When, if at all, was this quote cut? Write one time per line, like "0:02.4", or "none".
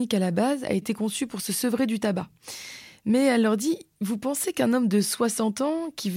none